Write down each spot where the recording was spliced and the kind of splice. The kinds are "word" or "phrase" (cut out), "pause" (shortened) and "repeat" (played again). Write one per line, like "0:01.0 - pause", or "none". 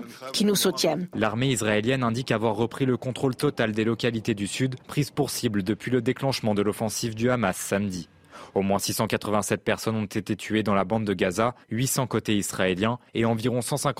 0:04.8 - pause
0:11.6 - pause
0:13.1 - pause

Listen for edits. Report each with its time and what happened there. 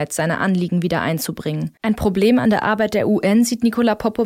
none

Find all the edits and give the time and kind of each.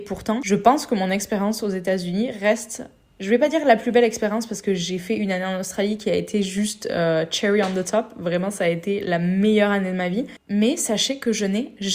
none

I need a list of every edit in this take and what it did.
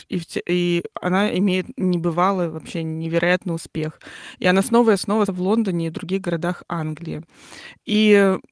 0:05.3 - word

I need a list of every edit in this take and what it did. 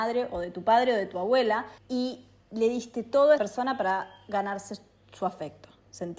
0:01.8 - pause
0:03.4 - word

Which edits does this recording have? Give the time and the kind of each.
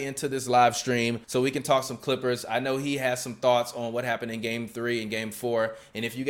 0:01.2 - pause

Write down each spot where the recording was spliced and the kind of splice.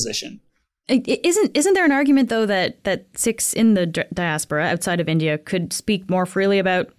none

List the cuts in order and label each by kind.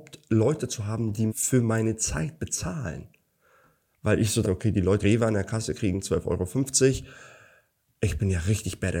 0:01.3 - word
0:04.4 - word
0:05.0 - word

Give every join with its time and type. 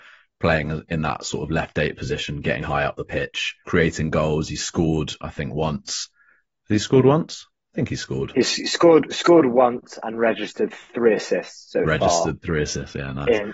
0:02.6 - word
0:03.6 - pause

